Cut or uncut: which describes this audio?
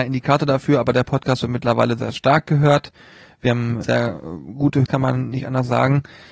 cut